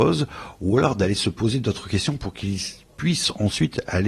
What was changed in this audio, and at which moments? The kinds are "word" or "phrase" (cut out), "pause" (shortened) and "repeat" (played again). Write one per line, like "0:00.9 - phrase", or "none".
none